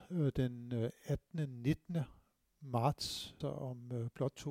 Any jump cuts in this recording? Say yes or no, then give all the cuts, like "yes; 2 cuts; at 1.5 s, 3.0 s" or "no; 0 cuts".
yes; 1 cut; at 3.4 s